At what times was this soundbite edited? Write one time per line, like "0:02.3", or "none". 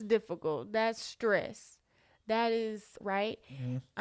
0:03.0